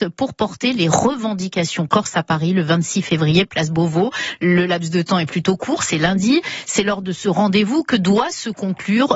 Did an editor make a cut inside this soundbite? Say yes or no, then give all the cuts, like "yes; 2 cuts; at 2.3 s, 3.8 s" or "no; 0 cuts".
no; 0 cuts